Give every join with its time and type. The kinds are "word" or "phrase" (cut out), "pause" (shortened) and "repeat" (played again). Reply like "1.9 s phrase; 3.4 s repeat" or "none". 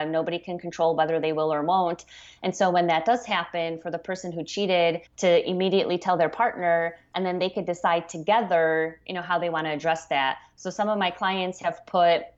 5.1 s pause